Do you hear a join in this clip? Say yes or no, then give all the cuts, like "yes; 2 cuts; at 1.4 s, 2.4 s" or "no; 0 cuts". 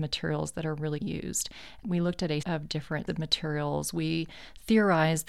yes; 3 cuts; at 1.0 s, 2.4 s, 3.1 s